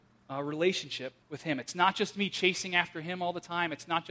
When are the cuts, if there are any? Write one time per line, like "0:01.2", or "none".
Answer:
0:01.2